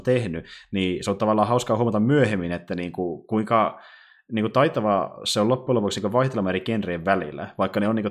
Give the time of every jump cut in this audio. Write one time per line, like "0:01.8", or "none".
none

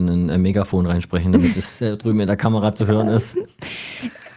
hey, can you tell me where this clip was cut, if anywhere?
none

